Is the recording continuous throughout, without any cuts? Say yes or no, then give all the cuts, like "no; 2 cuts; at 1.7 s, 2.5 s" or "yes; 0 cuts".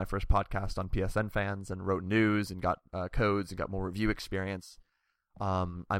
yes; 0 cuts